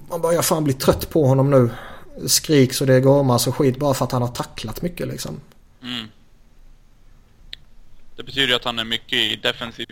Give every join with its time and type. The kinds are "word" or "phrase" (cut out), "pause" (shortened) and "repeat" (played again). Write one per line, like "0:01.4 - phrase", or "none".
none